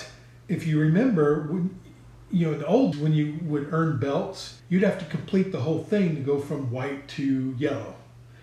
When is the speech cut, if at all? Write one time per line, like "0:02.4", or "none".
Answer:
0:02.9
0:04.6